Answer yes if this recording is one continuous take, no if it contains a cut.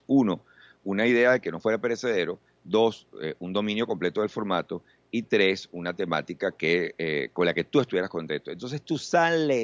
yes